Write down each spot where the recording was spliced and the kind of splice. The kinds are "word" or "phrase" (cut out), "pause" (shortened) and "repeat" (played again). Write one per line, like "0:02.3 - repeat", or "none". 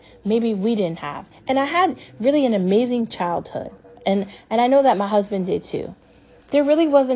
none